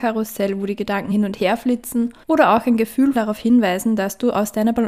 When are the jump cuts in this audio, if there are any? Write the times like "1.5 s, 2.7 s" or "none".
1.1 s, 2.2 s, 3.2 s